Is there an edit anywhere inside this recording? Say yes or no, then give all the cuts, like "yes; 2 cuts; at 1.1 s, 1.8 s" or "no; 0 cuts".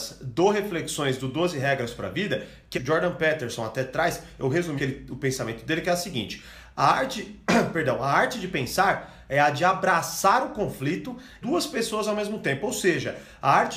yes; 3 cuts; at 2.7 s, 4.8 s, 11.4 s